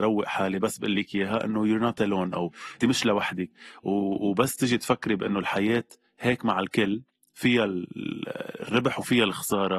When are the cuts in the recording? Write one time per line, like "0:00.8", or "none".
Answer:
0:02.8